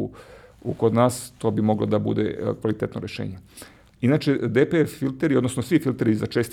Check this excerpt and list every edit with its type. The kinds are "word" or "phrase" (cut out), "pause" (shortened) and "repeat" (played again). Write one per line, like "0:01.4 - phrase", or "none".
none